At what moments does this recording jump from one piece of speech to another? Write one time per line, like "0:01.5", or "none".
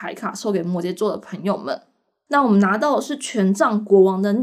none